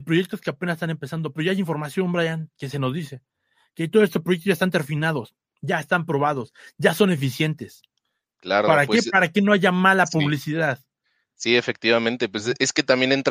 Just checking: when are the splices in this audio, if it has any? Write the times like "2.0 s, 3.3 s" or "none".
none